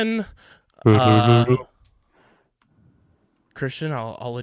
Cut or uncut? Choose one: uncut